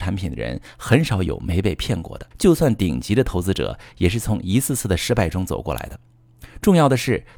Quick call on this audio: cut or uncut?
cut